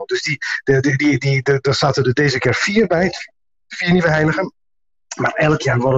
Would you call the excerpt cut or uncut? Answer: uncut